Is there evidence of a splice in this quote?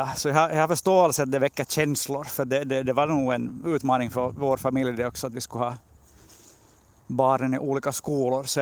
no; 0 cuts

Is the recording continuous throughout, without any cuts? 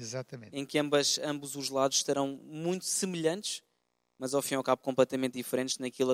yes; 0 cuts

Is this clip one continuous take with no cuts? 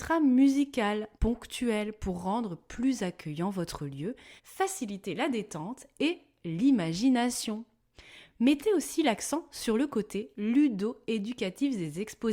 no; 2 cuts; at 1.2 s, 4.4 s

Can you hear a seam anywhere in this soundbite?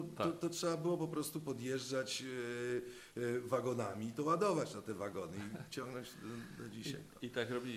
no; 0 cuts

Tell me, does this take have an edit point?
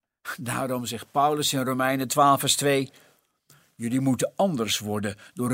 no; 0 cuts

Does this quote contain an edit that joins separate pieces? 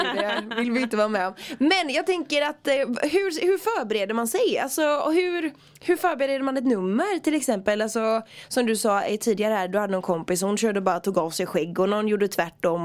no; 0 cuts

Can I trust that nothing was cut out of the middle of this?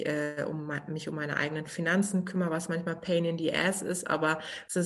yes; 0 cuts

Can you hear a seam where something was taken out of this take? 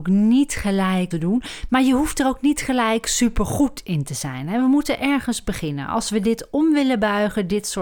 yes; 1 cut; at 1.1 s

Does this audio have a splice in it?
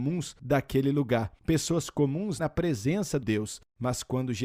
yes; 2 cuts; at 2.4 s, 3.2 s

